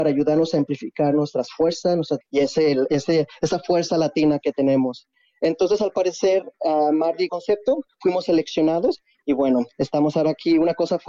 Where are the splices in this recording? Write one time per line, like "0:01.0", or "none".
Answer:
0:02.2
0:07.3